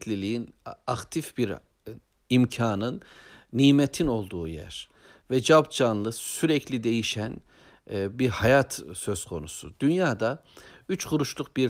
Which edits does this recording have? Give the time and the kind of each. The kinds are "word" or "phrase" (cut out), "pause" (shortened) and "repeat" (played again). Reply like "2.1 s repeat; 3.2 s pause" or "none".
none